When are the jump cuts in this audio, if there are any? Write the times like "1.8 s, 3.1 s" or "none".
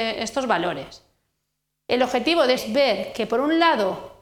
2.6 s